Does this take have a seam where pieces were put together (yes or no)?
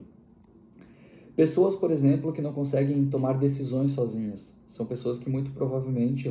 no